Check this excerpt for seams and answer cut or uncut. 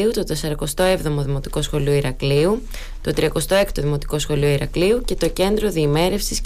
uncut